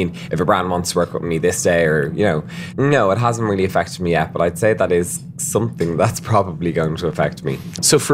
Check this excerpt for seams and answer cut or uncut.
cut